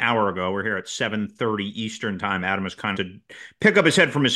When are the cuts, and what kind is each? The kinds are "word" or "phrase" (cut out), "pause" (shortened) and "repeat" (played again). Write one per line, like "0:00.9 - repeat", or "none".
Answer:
0:02.9 - word